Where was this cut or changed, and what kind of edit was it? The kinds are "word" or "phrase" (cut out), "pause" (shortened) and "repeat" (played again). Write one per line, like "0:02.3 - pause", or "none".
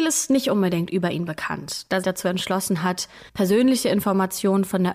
0:02.0 - phrase
0:03.3 - pause